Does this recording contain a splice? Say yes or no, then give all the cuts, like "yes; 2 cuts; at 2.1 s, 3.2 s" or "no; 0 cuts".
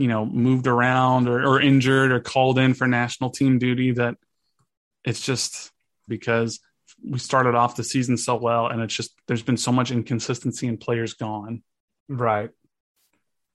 yes; 1 cut; at 6.1 s